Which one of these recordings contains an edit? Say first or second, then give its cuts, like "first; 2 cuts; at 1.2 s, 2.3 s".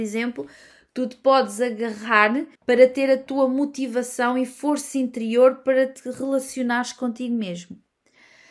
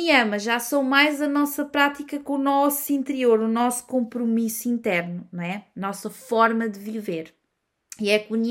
first; 1 cut; at 2.6 s